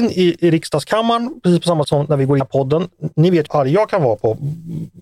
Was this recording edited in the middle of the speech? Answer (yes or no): yes